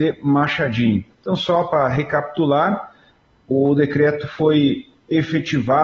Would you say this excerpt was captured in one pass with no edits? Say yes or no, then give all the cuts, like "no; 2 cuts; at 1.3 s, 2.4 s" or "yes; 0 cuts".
no; 1 cut; at 1.1 s